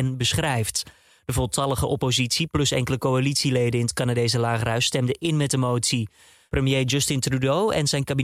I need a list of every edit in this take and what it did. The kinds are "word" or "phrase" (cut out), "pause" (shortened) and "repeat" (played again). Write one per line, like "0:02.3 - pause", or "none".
none